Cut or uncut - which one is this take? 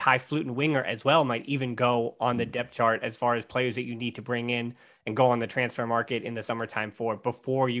uncut